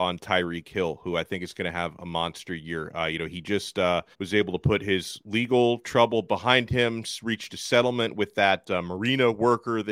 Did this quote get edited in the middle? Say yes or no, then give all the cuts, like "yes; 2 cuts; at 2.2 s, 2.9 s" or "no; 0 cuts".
yes; 1 cut; at 4.1 s